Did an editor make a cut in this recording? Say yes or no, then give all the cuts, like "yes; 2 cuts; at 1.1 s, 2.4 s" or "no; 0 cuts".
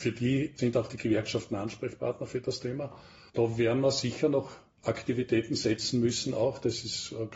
no; 0 cuts